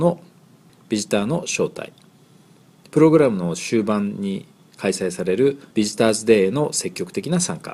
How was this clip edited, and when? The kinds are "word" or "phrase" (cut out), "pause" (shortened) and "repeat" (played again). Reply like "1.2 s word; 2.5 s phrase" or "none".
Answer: 5.7 s pause